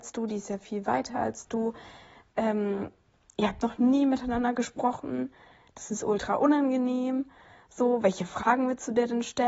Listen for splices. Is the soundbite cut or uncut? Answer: uncut